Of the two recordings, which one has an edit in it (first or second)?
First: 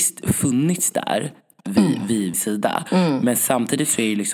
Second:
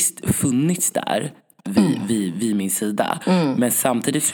first